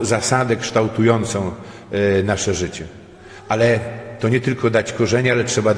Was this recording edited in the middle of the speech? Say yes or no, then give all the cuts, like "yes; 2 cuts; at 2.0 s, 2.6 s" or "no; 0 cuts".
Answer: no; 0 cuts